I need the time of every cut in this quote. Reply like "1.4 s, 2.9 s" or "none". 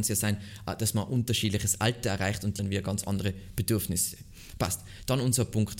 2.6 s